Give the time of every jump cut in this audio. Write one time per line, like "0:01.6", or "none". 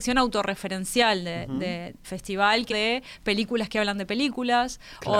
0:02.0
0:02.7